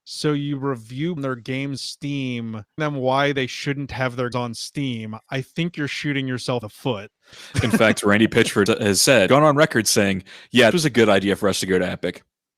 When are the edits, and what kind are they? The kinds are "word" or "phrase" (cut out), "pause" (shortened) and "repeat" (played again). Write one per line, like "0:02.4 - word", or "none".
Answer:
0:01.2 - word
0:01.8 - word
0:02.8 - word
0:04.3 - word
0:06.6 - word
0:08.7 - word
0:09.3 - word
0:10.7 - word